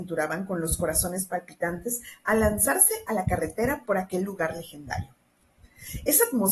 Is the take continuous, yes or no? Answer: yes